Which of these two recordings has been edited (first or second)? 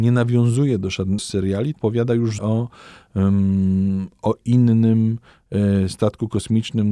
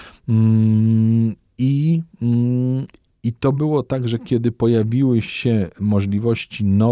first